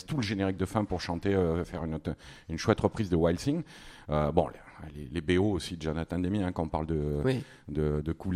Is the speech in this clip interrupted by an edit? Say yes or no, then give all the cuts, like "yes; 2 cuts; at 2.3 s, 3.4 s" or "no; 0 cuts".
no; 0 cuts